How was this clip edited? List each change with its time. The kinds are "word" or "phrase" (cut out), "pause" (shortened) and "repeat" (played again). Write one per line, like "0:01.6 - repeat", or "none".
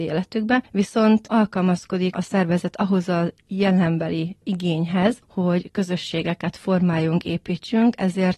0:02.1 - word